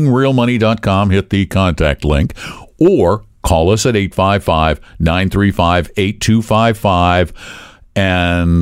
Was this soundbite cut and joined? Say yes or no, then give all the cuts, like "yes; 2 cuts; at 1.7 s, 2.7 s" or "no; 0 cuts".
no; 0 cuts